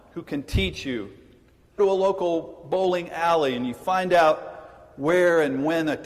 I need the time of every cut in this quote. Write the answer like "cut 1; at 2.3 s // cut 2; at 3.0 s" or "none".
cut 1; at 1.8 s